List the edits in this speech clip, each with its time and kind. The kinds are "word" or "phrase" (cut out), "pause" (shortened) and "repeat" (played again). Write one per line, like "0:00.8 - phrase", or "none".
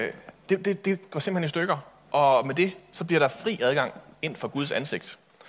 none